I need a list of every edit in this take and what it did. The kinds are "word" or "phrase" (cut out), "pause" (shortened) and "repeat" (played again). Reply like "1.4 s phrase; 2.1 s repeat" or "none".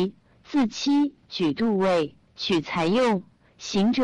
2.3 s pause